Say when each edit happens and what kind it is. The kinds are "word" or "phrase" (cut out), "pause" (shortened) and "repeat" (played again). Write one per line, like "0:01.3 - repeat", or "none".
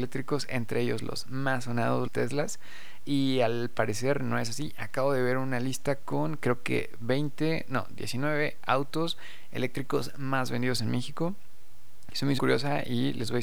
0:02.1 - phrase
0:12.4 - word